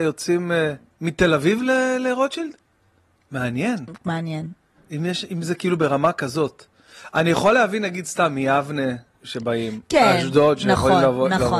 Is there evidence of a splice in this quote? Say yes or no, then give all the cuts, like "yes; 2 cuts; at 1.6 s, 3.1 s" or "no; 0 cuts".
no; 0 cuts